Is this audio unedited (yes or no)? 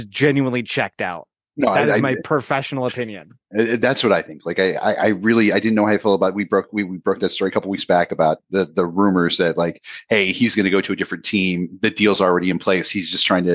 yes